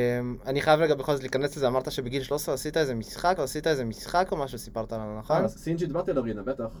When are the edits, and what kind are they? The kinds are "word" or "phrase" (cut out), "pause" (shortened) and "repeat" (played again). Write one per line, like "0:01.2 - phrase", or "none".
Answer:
0:03.4 - repeat